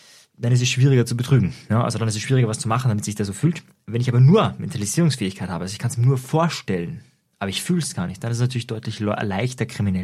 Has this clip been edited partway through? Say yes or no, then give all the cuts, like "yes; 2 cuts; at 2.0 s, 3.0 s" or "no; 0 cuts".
no; 0 cuts